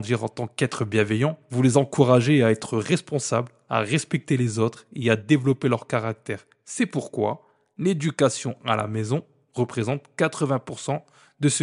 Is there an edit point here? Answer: no; 0 cuts

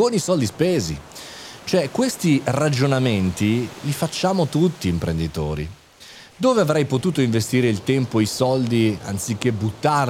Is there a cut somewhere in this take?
no; 0 cuts

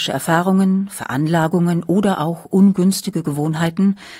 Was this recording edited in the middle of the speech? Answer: no; 0 cuts

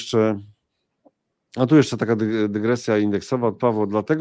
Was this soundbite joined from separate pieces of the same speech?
no; 0 cuts

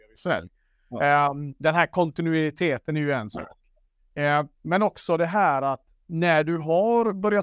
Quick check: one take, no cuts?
no; 3 cuts; at 1.6 s, 4.5 s, 6.0 s

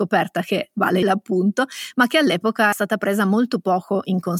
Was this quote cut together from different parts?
yes; 2 cuts; at 1.0 s, 2.7 s

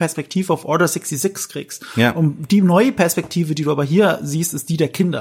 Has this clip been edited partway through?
no; 0 cuts

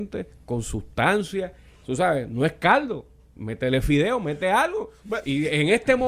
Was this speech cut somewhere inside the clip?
no; 0 cuts

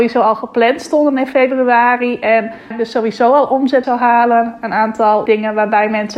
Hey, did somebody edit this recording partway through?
yes; 3 cuts; at 2.7 s, 3.8 s, 5.3 s

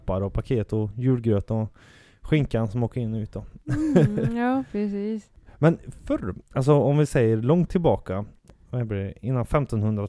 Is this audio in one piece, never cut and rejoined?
yes; 0 cuts

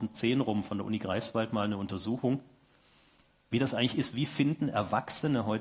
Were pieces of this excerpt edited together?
no; 0 cuts

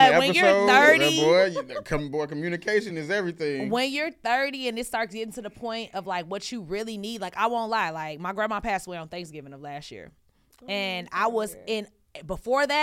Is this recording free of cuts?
yes; 0 cuts

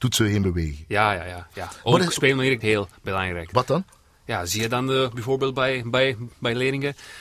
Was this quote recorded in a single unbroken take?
no; 1 cut; at 2.6 s

